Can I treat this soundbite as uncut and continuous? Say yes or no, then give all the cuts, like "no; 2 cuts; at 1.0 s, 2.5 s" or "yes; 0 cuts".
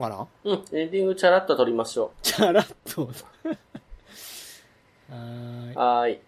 no; 1 cut; at 2.1 s